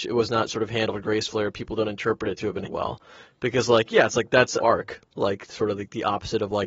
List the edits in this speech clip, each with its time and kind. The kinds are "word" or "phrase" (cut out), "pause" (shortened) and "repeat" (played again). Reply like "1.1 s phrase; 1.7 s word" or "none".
2.7 s word; 4.6 s word